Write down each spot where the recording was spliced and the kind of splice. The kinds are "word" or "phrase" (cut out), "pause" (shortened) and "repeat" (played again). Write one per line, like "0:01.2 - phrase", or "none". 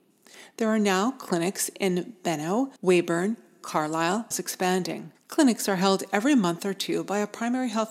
0:02.8 - pause
0:04.3 - phrase
0:05.1 - pause